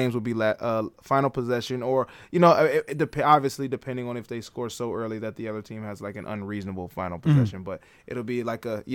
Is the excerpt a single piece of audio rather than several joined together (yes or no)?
yes